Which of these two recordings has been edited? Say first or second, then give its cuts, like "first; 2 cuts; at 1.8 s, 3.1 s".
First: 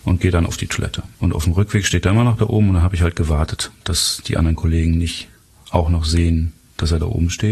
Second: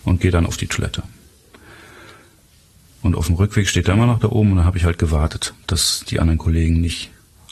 first; 1 cut; at 1.1 s